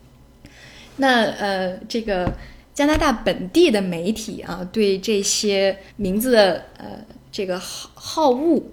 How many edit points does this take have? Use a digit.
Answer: 1